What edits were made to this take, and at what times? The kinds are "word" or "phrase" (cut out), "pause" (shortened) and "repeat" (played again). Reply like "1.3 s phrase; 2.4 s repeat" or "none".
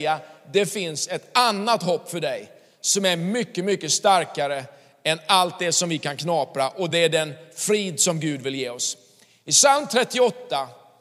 none